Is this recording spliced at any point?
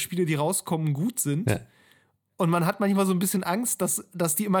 no; 0 cuts

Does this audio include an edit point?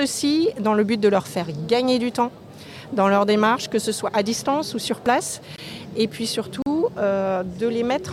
no; 0 cuts

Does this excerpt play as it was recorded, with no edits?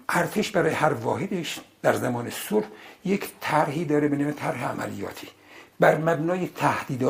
yes; 0 cuts

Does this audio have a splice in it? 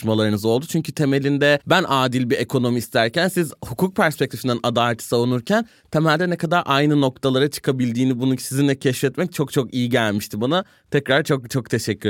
no; 0 cuts

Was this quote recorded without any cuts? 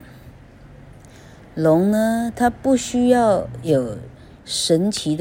yes; 0 cuts

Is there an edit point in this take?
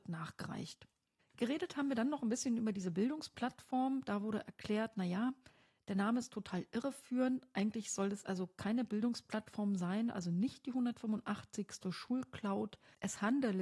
no; 0 cuts

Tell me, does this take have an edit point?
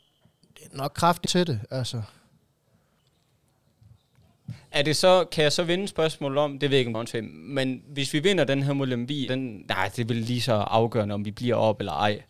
yes; 3 cuts; at 1.3 s, 6.9 s, 9.3 s

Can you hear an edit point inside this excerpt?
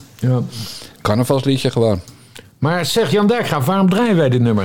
no; 0 cuts

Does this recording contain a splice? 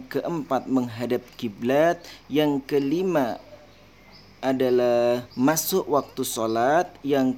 yes; 1 cut; at 5.3 s

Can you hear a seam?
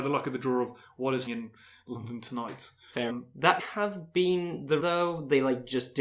yes; 4 cuts; at 1.3 s, 3.1 s, 3.6 s, 4.8 s

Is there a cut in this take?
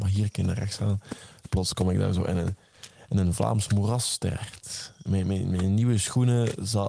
no; 0 cuts

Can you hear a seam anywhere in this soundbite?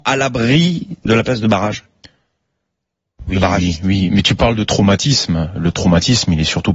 no; 0 cuts

